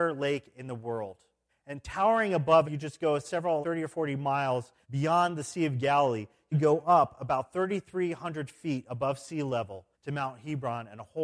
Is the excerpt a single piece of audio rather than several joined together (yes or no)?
no